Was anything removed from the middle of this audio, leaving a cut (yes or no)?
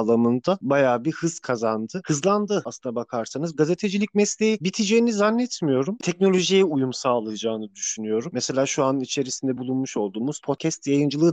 no